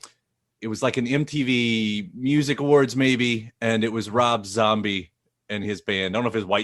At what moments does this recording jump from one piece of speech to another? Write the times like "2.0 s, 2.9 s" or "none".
none